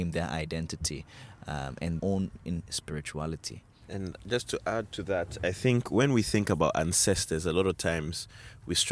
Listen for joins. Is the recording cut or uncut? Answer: cut